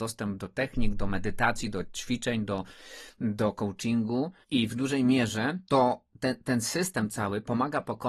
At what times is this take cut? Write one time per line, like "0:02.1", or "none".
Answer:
0:04.4
0:05.6